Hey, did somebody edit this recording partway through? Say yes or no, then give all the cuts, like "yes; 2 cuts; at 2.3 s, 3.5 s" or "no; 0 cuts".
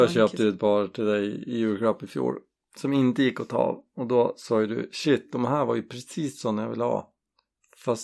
no; 0 cuts